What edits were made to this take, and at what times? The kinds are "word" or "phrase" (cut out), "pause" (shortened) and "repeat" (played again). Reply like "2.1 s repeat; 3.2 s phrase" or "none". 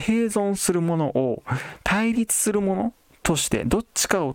none